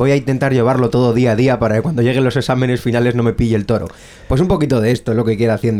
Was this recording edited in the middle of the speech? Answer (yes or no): no